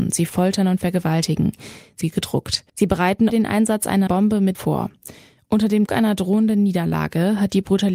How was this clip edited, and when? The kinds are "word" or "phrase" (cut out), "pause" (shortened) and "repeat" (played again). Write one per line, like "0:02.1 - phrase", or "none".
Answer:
0:02.0 - word
0:02.7 - pause
0:03.3 - word
0:04.1 - word
0:04.5 - word
0:05.9 - word